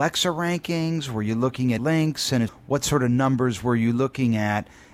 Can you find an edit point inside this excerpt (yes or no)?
yes